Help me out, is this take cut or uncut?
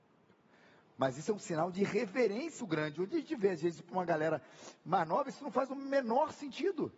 cut